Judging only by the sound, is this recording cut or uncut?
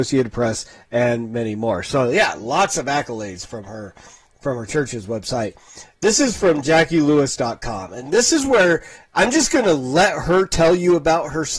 uncut